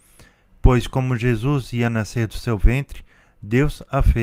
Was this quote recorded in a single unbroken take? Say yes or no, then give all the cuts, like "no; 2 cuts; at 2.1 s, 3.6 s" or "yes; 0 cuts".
yes; 0 cuts